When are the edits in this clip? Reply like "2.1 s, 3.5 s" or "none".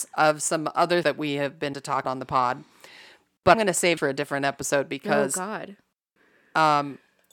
1.0 s, 1.7 s, 2.0 s, 3.5 s, 4.0 s

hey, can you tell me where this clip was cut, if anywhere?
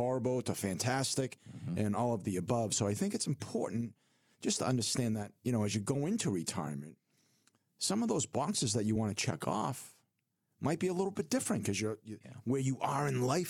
none

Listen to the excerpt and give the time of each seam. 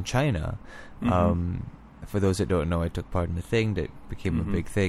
none

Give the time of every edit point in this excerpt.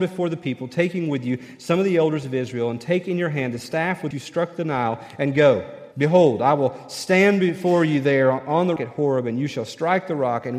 4.1 s, 5.9 s, 8.8 s

